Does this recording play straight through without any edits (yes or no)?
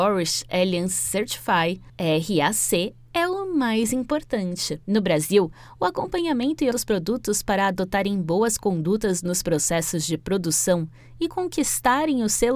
no